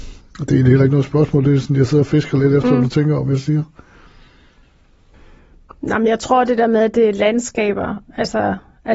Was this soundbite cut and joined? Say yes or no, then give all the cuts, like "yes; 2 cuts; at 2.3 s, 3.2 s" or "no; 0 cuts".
no; 0 cuts